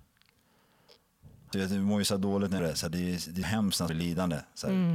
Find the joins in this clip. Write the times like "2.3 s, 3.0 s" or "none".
1.5 s, 2.6 s, 3.4 s, 3.9 s